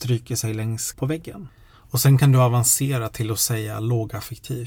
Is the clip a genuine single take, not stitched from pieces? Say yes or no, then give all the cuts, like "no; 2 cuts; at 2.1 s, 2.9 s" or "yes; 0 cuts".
no; 1 cut; at 0.9 s